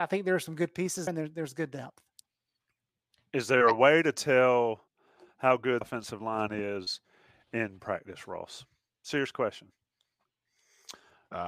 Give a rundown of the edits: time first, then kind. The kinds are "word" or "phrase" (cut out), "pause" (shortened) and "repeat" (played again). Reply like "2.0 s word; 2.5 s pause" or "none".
1.1 s word; 5.8 s word; 7.8 s word